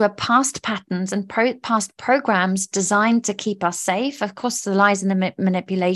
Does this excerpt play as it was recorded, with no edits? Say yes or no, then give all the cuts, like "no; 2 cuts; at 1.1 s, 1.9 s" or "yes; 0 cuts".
yes; 0 cuts